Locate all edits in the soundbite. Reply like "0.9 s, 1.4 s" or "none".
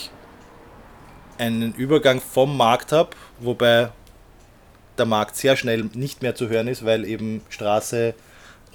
none